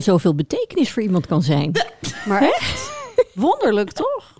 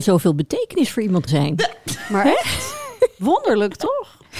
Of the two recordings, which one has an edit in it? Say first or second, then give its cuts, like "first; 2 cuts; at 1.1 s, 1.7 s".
second; 1 cut; at 1.3 s